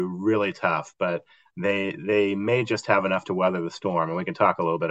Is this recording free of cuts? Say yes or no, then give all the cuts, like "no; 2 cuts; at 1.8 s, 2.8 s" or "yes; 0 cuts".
yes; 0 cuts